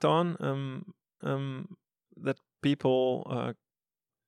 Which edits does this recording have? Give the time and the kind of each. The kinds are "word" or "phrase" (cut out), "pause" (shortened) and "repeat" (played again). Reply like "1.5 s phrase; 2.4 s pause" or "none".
1.2 s repeat